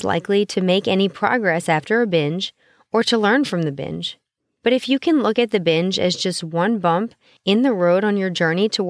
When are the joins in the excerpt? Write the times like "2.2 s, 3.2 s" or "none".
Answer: none